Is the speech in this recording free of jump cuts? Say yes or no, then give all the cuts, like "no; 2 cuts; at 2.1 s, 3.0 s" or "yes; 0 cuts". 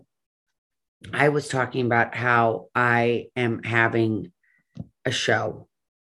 yes; 0 cuts